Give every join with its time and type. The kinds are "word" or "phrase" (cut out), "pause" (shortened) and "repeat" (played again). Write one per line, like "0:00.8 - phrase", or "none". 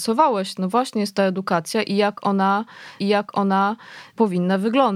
0:03.0 - repeat